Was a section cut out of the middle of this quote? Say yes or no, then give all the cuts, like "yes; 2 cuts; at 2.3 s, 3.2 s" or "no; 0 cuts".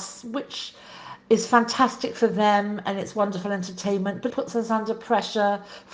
yes; 1 cut; at 4.3 s